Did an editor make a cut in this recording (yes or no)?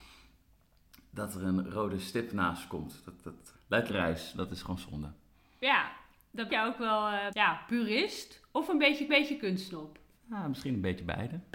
yes